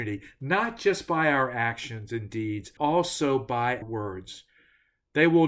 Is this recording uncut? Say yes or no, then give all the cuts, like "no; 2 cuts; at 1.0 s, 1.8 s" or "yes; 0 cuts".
no; 2 cuts; at 2.8 s, 3.8 s